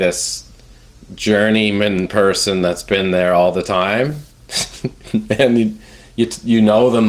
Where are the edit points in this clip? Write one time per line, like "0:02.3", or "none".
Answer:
none